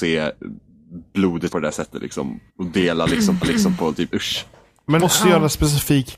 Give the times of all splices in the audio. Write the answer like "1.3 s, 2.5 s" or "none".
1.5 s, 2.5 s, 3.4 s, 4.1 s, 5.0 s